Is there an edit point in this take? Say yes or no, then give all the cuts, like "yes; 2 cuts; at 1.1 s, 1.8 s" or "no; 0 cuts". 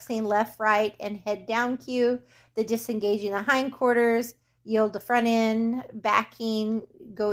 no; 0 cuts